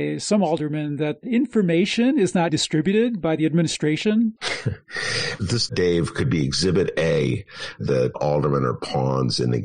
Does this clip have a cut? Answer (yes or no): yes